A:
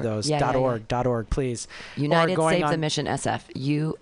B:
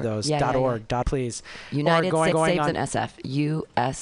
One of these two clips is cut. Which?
B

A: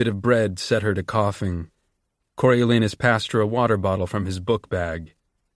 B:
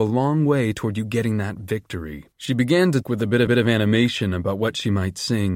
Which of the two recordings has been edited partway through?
B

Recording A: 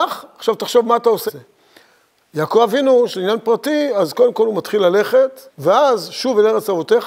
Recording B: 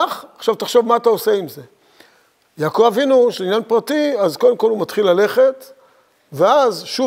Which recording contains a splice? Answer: A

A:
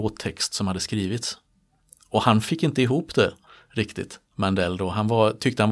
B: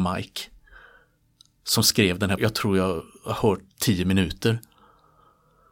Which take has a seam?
B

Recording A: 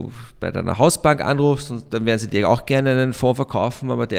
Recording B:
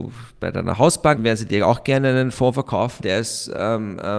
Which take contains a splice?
B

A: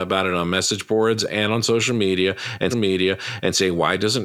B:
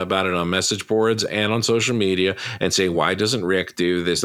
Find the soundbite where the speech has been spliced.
A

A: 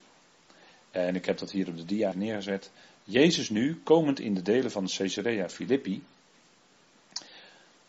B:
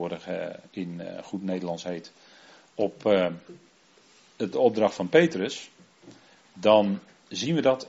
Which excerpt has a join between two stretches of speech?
A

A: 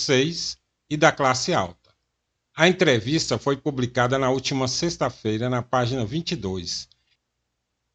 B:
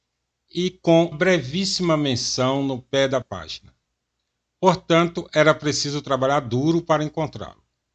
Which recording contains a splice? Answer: B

